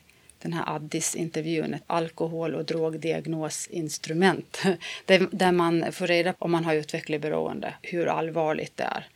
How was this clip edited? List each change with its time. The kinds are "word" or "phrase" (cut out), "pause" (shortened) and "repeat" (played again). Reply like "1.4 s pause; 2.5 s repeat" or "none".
1.8 s word; 6.3 s word; 7.8 s word

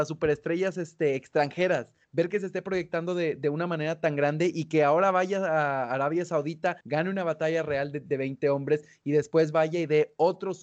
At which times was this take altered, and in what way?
2.0 s pause; 6.8 s pause

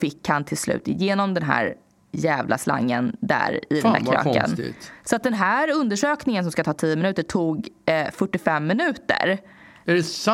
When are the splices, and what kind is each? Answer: none

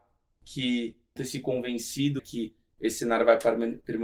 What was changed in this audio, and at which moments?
1.2 s word; 2.2 s word

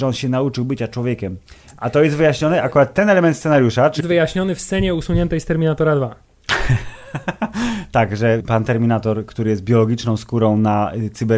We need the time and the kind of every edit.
4.0 s word; 8.4 s word

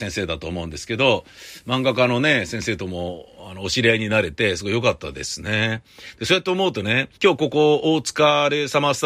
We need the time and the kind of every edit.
7.2 s pause

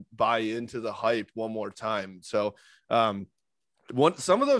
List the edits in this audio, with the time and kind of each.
none

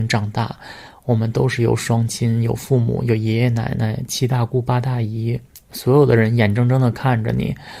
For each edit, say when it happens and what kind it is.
5.6 s pause

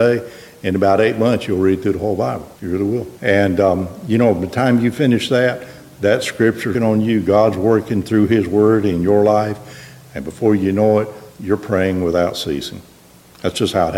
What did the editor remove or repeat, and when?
2.6 s pause; 3.2 s pause; 6.7 s word; 11.3 s pause

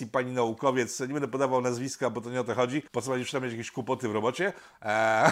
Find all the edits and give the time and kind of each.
2.9 s pause

